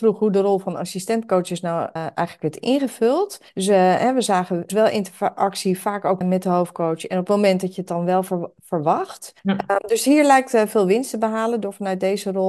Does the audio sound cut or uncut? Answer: cut